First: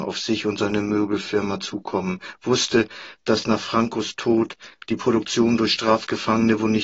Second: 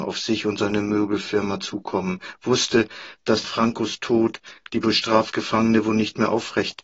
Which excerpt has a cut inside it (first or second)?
second